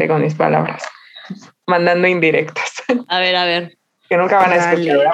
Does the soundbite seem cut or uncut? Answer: uncut